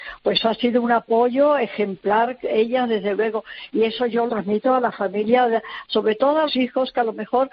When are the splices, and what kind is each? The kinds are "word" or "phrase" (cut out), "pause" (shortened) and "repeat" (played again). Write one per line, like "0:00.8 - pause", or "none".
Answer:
0:04.3 - word
0:06.5 - word